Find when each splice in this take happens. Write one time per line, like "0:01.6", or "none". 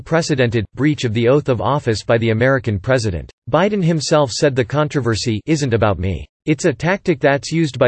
0:03.4
0:06.3